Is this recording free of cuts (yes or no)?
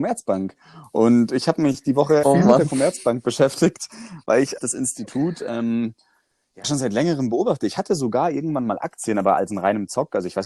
no